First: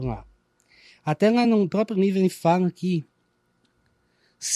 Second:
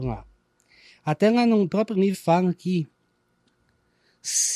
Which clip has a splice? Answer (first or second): second